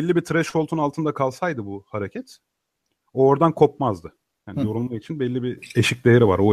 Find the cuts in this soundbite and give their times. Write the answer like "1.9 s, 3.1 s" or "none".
none